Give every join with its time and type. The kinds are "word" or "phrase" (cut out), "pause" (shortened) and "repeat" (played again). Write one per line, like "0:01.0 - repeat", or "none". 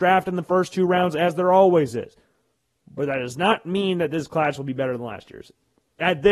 none